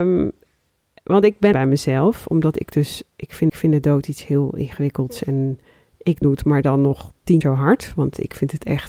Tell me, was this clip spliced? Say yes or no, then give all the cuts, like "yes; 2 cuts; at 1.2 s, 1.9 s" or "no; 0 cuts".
yes; 4 cuts; at 1.5 s, 3.5 s, 6.2 s, 7.4 s